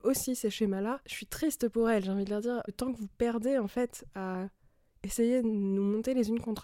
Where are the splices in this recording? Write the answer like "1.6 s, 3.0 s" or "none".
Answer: none

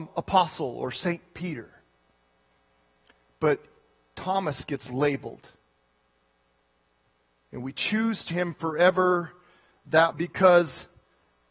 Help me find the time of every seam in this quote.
8.3 s, 10.1 s

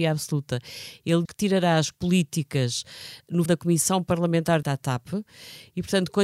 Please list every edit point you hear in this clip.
1.2 s, 1.9 s, 3.5 s, 4.6 s

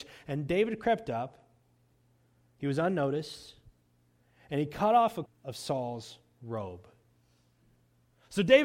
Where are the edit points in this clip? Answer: 5.3 s

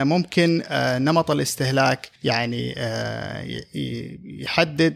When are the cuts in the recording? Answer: 2.2 s

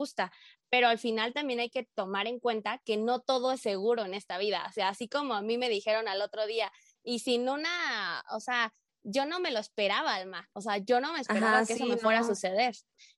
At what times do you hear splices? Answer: none

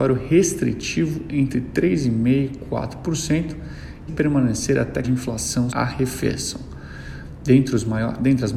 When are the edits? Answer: 4.1 s, 5.0 s, 5.7 s

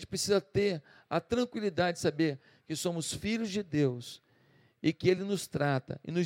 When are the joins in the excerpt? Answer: none

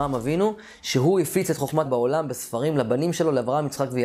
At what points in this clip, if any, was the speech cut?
1.9 s

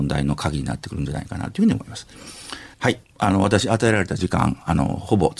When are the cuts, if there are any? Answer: 2.7 s

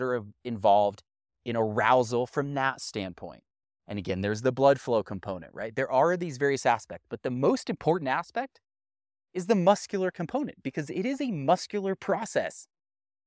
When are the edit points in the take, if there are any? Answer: none

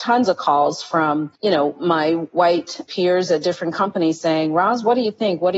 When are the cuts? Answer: 1.4 s, 2.9 s

